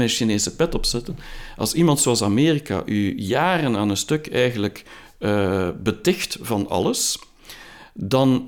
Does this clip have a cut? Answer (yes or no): no